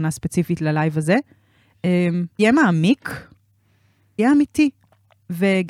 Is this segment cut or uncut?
cut